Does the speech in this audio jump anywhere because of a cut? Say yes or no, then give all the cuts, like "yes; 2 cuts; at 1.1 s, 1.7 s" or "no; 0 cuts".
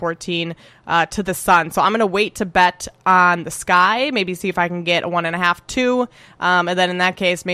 no; 0 cuts